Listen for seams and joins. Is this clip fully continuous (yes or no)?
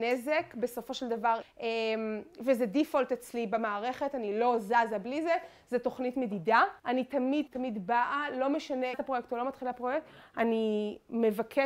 no